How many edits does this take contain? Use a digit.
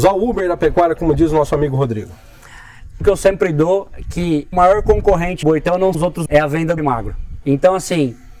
6